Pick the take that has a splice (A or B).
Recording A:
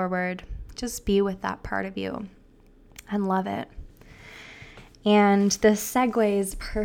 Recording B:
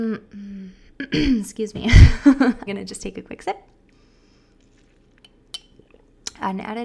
B